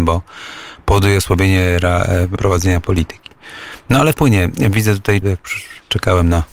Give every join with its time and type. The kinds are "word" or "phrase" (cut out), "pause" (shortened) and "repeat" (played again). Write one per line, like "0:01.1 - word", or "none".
0:02.4 - word
0:02.8 - word
0:04.1 - word
0:05.2 - phrase